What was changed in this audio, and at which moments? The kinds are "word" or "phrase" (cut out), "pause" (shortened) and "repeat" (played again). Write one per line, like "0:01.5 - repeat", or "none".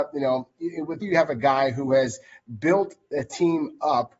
0:01.0 - word